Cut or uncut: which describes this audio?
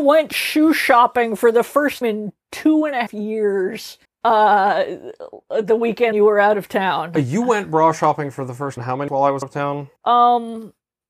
cut